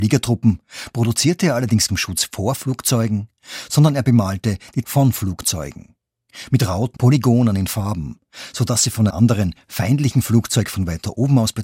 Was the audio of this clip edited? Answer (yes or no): yes